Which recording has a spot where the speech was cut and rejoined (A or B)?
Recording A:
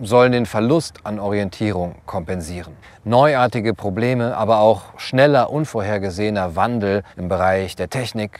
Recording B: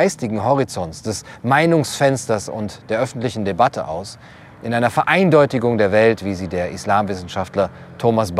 A